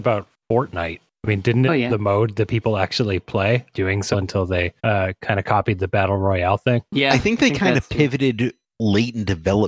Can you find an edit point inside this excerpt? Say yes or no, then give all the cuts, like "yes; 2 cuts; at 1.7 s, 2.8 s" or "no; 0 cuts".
yes; 4 cuts; at 1.7 s, 3.7 s, 4.1 s, 4.8 s